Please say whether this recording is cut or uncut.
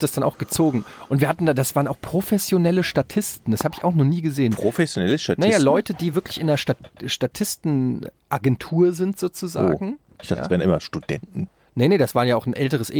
uncut